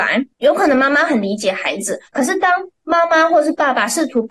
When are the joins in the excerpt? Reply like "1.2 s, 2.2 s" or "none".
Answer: 2.1 s